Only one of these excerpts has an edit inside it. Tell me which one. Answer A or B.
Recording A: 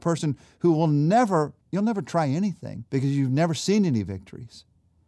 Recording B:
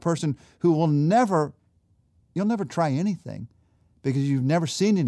A